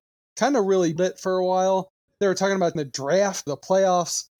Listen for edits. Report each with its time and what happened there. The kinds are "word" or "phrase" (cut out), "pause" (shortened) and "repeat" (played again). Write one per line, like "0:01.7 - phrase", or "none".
0:01.0 - word
0:02.8 - word
0:03.5 - word